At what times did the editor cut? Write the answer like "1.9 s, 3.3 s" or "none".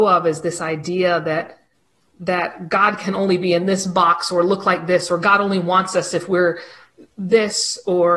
none